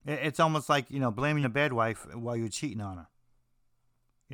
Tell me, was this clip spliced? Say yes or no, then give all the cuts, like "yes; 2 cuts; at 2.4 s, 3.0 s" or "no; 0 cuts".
yes; 1 cut; at 1.4 s